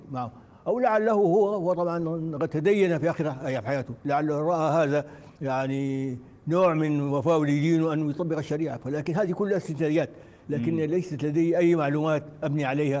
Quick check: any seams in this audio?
yes; 1 cut; at 5.4 s

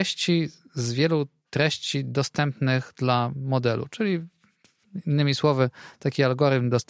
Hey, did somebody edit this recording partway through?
no; 0 cuts

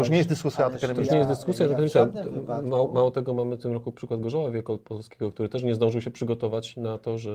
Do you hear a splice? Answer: no; 0 cuts

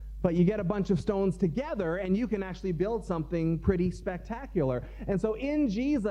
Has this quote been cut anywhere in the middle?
no; 0 cuts

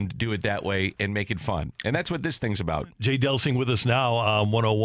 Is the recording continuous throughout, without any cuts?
yes; 0 cuts

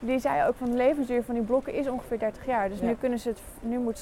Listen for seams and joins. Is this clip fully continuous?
yes; 0 cuts

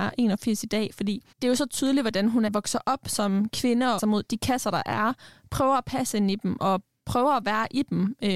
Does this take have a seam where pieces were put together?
yes; 3 cuts; at 1.3 s, 2.5 s, 4.0 s

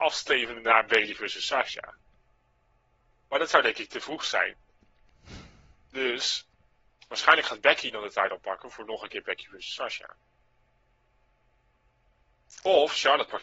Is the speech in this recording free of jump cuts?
yes; 0 cuts

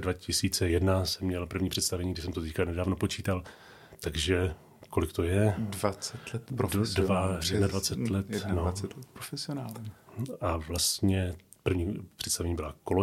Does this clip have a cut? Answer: no; 0 cuts

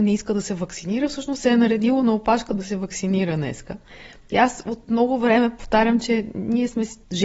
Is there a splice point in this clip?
no; 0 cuts

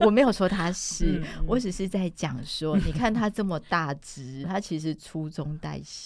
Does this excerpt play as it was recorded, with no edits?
no; 1 cut; at 4.4 s

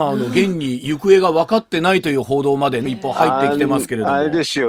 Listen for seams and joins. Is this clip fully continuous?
no; 1 cut; at 2.9 s

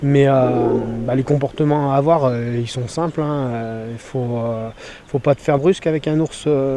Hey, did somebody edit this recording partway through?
yes; 1 cut; at 5.6 s

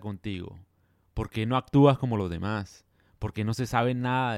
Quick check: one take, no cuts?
yes; 0 cuts

